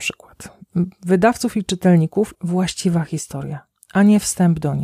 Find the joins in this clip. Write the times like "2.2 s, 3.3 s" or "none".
2.3 s

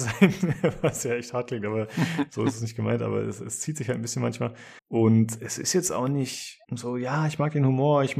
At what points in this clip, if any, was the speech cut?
4.8 s, 6.6 s

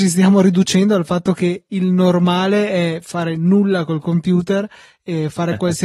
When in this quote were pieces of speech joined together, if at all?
none

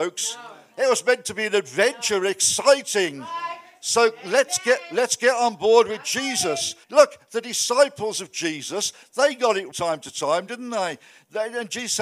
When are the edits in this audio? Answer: 6.8 s, 9.7 s

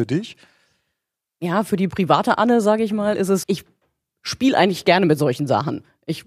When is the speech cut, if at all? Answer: 3.4 s

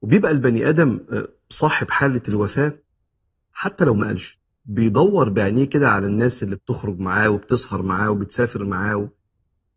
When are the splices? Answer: none

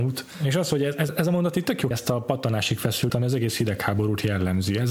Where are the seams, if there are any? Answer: 1.1 s, 1.9 s, 3.1 s

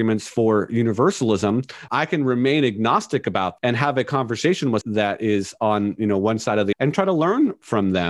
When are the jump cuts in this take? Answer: 1.9 s, 3.6 s, 4.8 s, 6.7 s

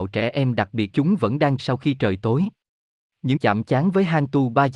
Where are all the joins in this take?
0.9 s, 1.6 s, 3.4 s

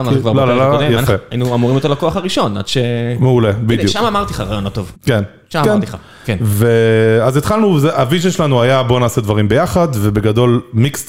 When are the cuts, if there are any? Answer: 4.9 s

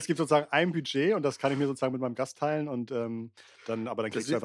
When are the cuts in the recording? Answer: none

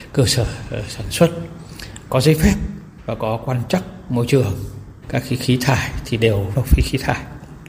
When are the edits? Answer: 2.1 s, 5.0 s, 6.5 s

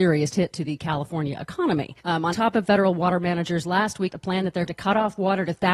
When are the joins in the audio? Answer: 2.0 s, 2.3 s, 2.6 s, 4.1 s, 4.7 s

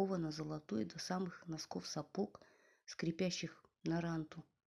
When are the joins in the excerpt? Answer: none

